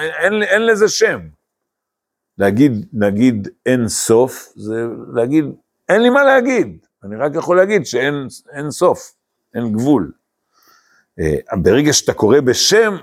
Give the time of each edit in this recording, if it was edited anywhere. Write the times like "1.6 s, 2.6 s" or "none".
none